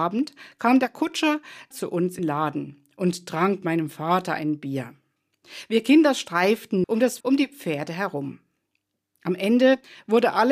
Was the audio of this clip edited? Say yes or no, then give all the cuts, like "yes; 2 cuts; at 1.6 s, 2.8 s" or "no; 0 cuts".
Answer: yes; 5 cuts; at 1.7 s, 2.2 s, 3.6 s, 6.8 s, 7.2 s